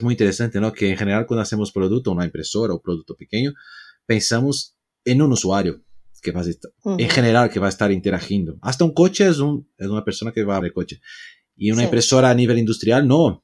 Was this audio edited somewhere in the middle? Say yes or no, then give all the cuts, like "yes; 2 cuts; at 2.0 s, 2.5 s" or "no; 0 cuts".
yes; 1 cut; at 10.6 s